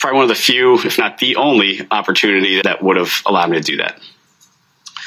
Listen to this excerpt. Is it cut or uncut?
cut